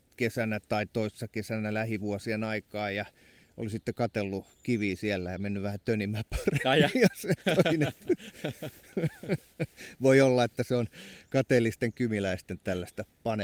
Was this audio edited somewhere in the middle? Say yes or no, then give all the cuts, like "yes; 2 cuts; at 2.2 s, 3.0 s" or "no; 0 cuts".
no; 0 cuts